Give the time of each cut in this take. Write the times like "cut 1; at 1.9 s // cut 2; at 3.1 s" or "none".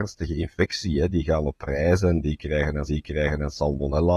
cut 1; at 2.9 s